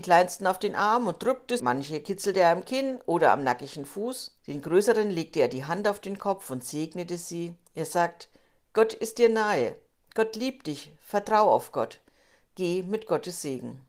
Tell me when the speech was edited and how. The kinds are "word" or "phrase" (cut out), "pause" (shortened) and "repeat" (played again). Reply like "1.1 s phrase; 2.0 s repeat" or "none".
1.6 s word; 4.4 s pause

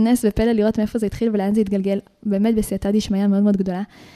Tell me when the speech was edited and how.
none

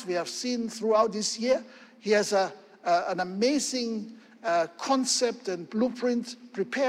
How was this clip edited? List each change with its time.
none

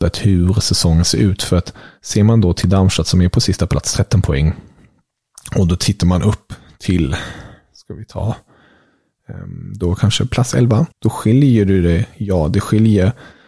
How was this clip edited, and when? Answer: 10.9 s pause

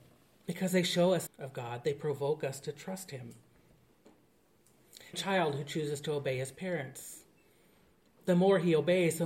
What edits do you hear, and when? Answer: 1.3 s phrase; 5.1 s phrase

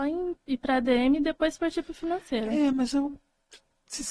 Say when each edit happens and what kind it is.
none

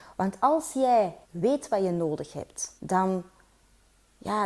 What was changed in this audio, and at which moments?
1.2 s pause; 2.8 s pause

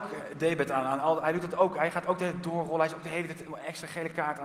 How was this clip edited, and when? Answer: none

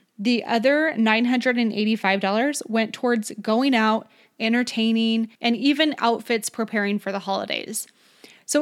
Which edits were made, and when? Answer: 5.3 s pause

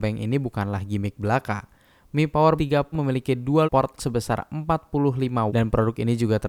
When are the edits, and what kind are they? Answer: 2.6 s word; 2.9 s word; 3.6 s word; 4.0 s word; 5.5 s word

